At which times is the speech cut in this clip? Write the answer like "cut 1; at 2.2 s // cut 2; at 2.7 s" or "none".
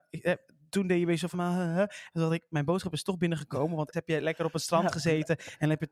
cut 1; at 1.3 s // cut 2; at 3.9 s